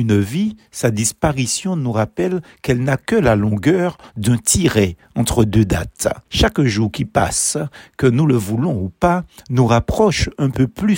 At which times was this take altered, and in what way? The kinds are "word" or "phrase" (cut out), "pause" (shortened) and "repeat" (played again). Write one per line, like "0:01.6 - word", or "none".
0:06.2 - pause